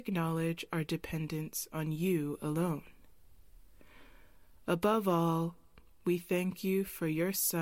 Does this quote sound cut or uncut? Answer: uncut